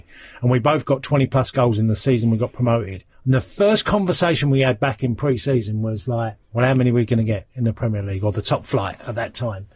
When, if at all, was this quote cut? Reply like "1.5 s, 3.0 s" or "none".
3.1 s, 6.4 s